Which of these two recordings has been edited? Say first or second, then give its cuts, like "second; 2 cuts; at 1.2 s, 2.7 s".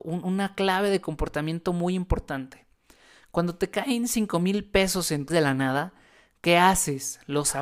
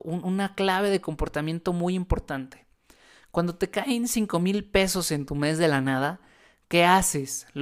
first; 1 cut; at 5.3 s